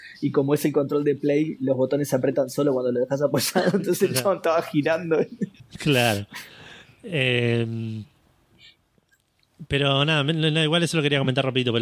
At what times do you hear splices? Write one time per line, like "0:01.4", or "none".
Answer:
0:05.6